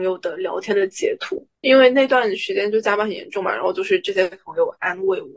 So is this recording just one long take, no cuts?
no; 1 cut; at 1.6 s

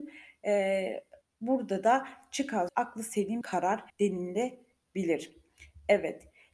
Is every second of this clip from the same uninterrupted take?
no; 4 cuts; at 1.2 s, 2.7 s, 3.4 s, 3.9 s

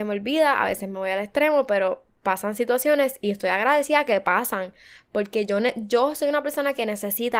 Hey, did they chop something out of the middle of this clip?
no; 0 cuts

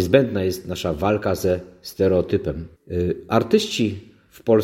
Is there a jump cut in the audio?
yes; 1 cut; at 2.8 s

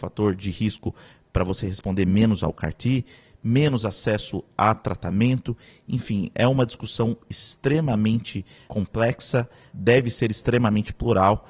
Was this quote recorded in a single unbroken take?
yes; 0 cuts

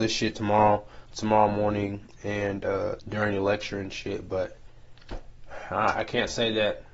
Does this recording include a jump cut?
yes; 2 cuts; at 1.1 s, 3.0 s

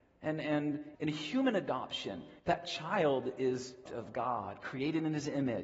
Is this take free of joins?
no; 3 cuts; at 0.9 s, 2.4 s, 3.9 s

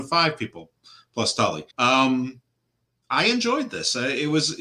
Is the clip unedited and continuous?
no; 1 cut; at 1.7 s

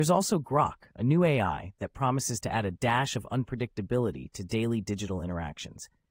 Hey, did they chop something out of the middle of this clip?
no; 0 cuts

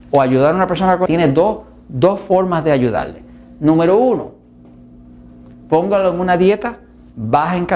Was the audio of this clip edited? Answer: yes; 1 cut; at 1.1 s

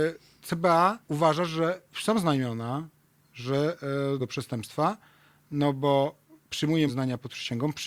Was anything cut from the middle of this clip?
yes; 4 cuts; at 1.0 s, 1.9 s, 4.2 s, 6.9 s

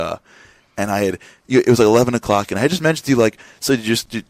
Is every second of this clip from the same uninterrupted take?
yes; 0 cuts

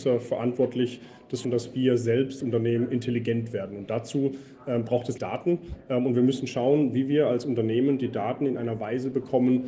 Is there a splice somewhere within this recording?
yes; 3 cuts; at 1.4 s, 2.4 s, 5.2 s

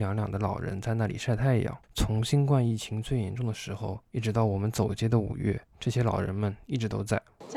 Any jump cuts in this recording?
yes; 3 cuts; at 1.8 s, 4.0 s, 5.7 s

